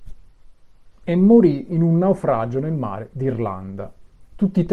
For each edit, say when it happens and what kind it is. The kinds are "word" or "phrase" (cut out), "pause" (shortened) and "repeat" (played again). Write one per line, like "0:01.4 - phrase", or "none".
none